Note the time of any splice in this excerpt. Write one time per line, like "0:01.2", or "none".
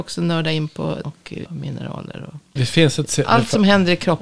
0:01.0
0:01.5
0:02.6